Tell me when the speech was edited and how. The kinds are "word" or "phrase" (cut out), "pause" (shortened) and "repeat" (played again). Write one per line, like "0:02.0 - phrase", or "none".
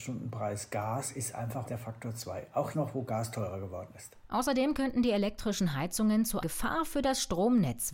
0:01.7 - word
0:02.7 - word
0:06.4 - word